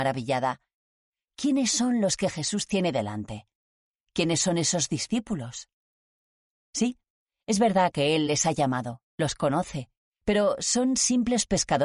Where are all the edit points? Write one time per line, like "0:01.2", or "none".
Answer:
none